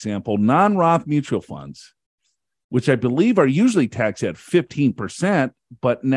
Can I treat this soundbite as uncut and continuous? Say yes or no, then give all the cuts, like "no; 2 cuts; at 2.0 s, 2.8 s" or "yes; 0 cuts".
yes; 0 cuts